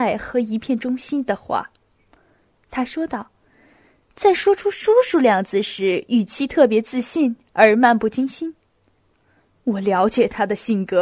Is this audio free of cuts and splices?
yes; 0 cuts

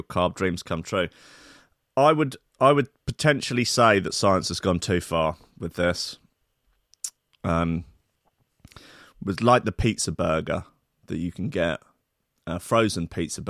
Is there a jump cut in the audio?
no; 0 cuts

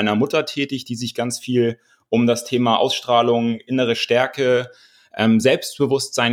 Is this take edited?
no; 0 cuts

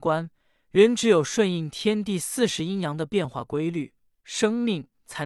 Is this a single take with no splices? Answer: yes; 0 cuts

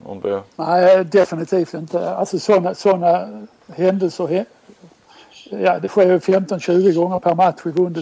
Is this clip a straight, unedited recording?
yes; 0 cuts

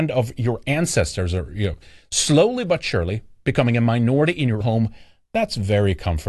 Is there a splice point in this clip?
yes; 1 cut; at 4.6 s

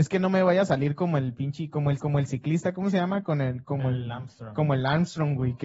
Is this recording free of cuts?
no; 1 cut; at 2.0 s

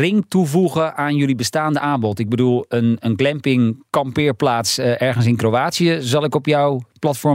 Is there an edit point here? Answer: yes; 1 cut; at 3.9 s

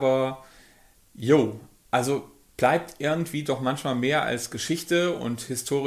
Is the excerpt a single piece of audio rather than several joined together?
yes; 0 cuts

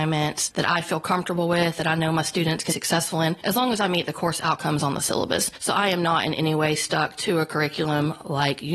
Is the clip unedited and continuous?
no; 1 cut; at 2.7 s

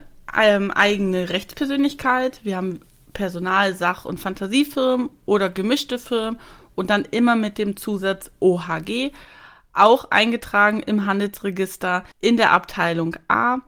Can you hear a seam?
yes; 1 cut; at 12.1 s

